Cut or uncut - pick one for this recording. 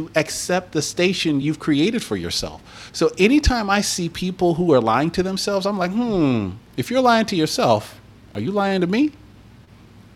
uncut